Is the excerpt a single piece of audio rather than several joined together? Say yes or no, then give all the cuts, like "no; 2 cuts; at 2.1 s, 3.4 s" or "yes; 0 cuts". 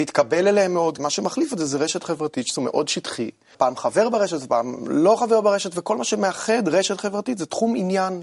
no; 3 cuts; at 1.0 s, 2.6 s, 3.5 s